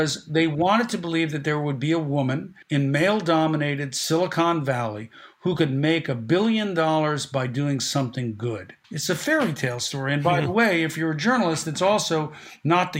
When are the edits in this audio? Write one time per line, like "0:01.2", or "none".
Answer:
0:02.6
0:08.8